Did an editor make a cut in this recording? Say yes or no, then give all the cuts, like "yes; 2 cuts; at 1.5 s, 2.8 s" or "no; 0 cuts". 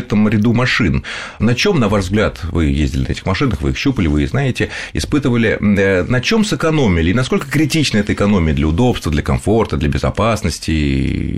no; 0 cuts